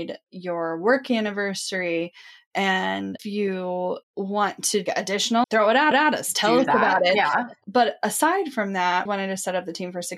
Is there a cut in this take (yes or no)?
yes